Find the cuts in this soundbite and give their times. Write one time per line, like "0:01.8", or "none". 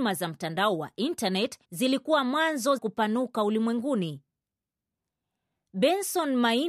0:01.6
0:02.8